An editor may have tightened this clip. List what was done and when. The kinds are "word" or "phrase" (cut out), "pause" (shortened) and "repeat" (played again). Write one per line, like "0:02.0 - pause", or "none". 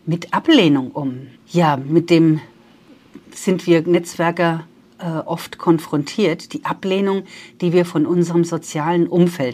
0:01.4 - pause